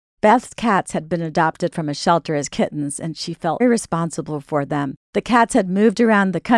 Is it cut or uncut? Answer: cut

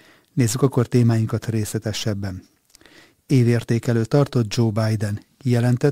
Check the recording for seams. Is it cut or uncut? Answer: uncut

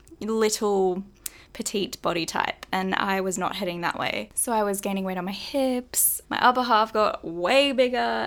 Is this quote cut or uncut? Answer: cut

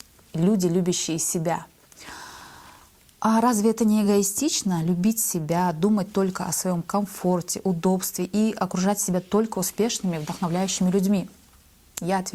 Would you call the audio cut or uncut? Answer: uncut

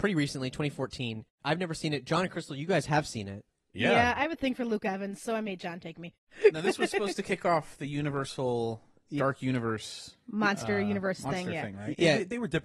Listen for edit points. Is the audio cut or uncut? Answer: uncut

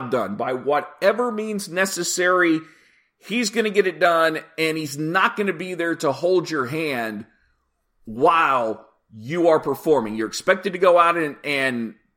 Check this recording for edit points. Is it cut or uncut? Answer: uncut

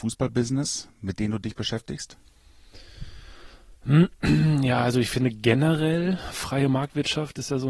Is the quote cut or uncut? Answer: uncut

